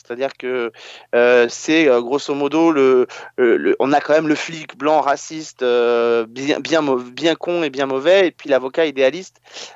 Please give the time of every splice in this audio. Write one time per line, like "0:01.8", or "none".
none